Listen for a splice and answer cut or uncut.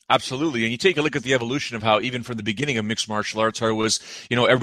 uncut